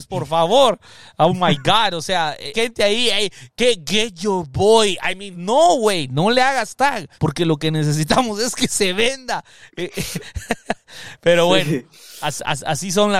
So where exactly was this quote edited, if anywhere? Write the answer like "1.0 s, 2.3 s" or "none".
2.5 s, 5.3 s, 7.1 s